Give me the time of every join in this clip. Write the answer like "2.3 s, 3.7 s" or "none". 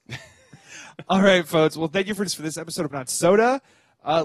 2.3 s, 2.9 s